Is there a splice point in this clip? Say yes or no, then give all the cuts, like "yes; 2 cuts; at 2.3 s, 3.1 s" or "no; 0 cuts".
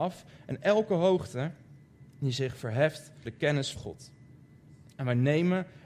yes; 2 cuts; at 3.3 s, 3.8 s